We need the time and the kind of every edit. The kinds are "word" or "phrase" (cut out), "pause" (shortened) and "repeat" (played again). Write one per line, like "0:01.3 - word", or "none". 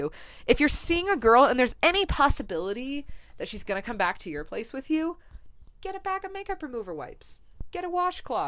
0:05.5 - pause

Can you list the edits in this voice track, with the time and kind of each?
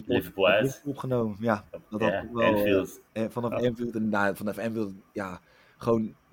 0:01.7 - pause
0:03.1 - pause

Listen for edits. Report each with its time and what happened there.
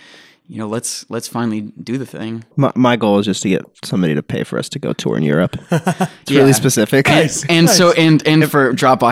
0:02.5 - pause

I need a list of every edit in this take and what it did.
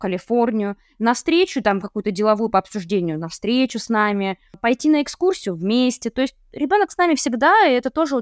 none

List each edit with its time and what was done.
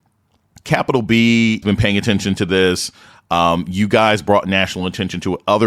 0:01.6 - word

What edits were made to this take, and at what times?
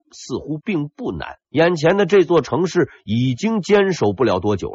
0:01.4 - pause

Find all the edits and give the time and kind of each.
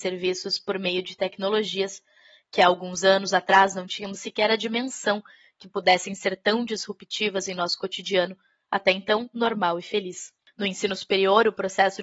none

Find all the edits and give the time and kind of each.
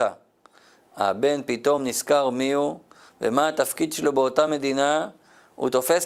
none

